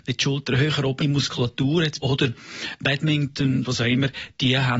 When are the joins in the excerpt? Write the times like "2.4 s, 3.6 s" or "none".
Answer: 1.0 s, 2.0 s, 3.6 s